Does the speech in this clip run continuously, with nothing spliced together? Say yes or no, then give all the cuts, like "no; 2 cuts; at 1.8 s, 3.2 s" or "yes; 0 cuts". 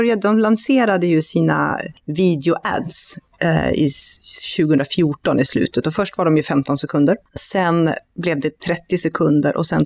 yes; 0 cuts